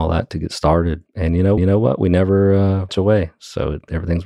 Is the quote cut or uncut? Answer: cut